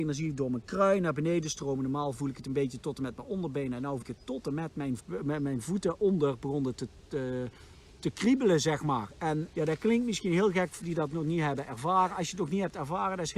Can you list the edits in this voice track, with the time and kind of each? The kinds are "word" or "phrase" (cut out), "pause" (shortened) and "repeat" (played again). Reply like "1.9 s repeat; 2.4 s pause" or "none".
4.0 s word; 5.0 s word; 9.5 s word; 10.8 s word